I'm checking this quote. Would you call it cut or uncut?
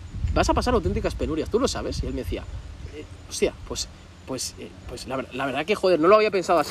uncut